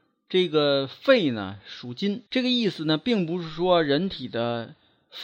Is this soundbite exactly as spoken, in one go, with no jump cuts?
no; 1 cut; at 2.3 s

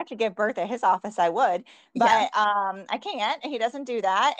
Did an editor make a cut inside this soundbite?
no; 0 cuts

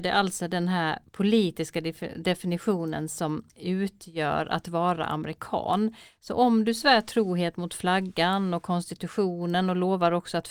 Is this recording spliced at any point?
yes; 1 cut; at 3.5 s

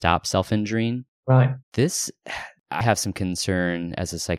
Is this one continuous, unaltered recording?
no; 2 cuts; at 1.6 s, 2.8 s

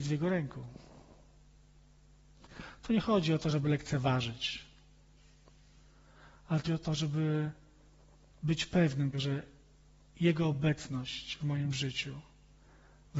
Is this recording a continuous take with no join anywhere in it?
no; 2 cuts; at 6.7 s, 9.1 s

